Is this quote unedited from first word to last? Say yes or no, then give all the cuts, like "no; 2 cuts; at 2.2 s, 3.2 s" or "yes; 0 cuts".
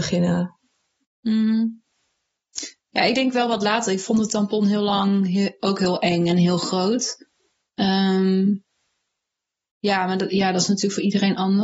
yes; 0 cuts